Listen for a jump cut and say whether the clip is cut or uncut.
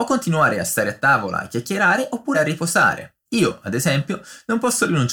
cut